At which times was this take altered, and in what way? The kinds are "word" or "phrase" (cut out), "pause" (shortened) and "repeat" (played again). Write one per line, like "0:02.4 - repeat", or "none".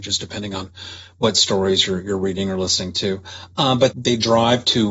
0:03.9 - word